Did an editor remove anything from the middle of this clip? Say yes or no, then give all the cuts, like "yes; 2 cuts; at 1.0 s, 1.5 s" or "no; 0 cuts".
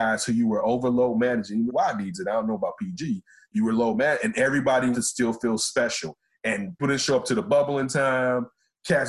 yes; 3 cuts; at 1.7 s, 4.9 s, 6.8 s